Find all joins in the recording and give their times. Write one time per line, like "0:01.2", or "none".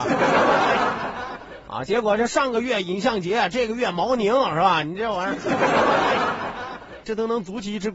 0:07.0